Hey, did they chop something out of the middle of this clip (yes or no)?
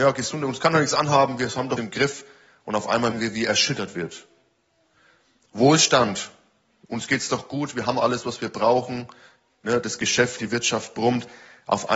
yes